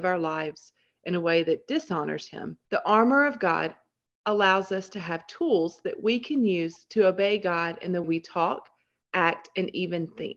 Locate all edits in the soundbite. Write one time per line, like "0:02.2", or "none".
0:02.7
0:08.0